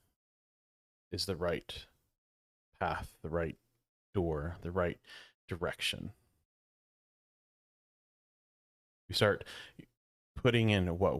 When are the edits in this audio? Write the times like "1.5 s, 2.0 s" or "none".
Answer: none